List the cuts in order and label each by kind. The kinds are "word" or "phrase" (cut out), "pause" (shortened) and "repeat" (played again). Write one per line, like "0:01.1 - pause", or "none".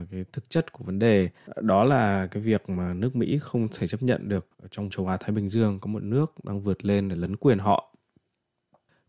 0:04.5 - pause
0:04.9 - word